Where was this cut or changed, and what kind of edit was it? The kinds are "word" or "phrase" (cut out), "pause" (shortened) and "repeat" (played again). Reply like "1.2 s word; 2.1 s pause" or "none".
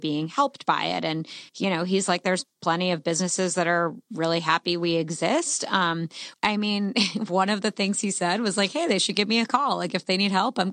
1.5 s pause